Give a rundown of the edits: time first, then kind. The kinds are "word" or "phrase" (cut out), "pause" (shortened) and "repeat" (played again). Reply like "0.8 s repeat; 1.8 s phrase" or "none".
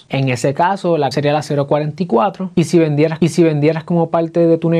1.1 s phrase; 3.2 s repeat